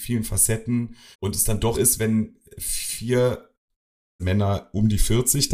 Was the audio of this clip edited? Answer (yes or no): yes